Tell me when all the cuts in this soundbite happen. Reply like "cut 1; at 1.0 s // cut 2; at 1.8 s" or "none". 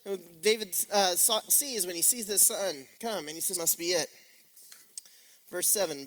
cut 1; at 1.5 s // cut 2; at 2.9 s // cut 3; at 3.5 s